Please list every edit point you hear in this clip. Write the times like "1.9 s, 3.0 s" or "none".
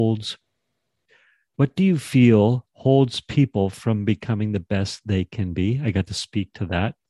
none